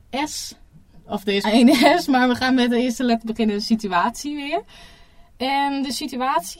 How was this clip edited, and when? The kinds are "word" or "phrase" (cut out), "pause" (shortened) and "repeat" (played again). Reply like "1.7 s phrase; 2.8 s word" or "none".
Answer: 1.4 s word